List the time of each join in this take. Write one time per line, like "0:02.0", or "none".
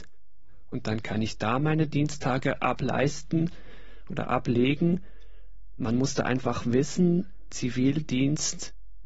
none